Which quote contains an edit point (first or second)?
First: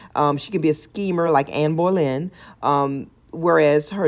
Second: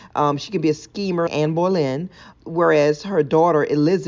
second